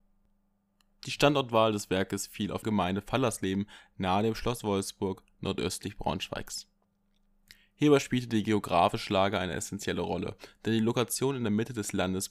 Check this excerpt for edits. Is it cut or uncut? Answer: cut